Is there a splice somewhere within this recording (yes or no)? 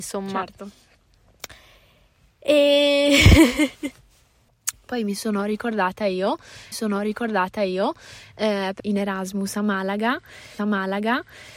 yes